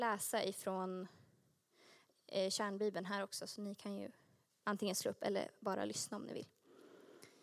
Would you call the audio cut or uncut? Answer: uncut